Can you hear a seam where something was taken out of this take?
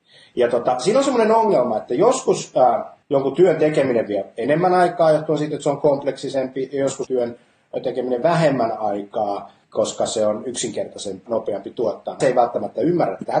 yes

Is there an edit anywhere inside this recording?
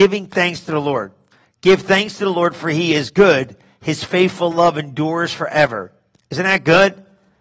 no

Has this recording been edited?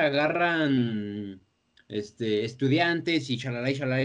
no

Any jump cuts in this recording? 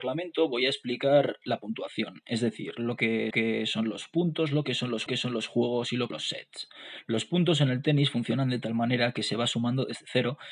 yes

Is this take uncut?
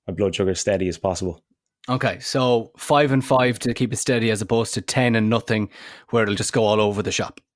yes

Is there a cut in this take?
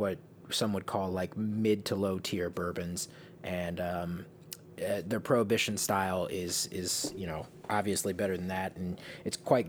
no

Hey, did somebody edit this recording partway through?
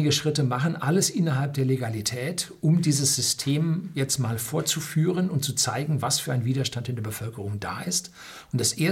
no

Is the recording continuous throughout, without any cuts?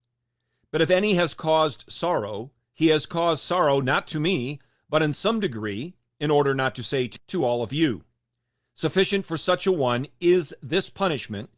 no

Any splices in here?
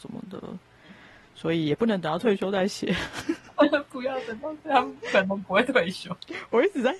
no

